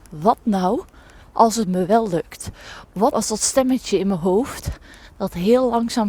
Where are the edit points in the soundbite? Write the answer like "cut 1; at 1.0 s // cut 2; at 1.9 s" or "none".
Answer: cut 1; at 3.1 s